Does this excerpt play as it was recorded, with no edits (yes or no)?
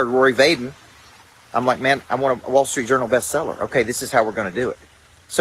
yes